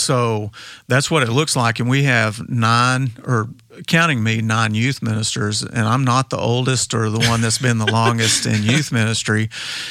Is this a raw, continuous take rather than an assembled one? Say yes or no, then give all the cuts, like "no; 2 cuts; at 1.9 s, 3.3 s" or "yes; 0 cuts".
yes; 0 cuts